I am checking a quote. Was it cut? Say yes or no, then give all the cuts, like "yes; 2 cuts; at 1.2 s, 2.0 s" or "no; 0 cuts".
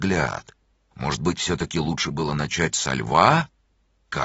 no; 0 cuts